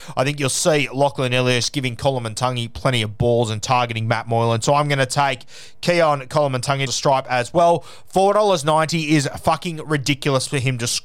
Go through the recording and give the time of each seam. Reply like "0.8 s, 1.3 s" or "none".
6.9 s